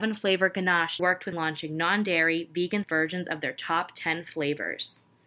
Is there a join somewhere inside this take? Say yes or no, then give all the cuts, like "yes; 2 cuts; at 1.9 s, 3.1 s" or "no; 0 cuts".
yes; 3 cuts; at 1.0 s, 1.3 s, 2.8 s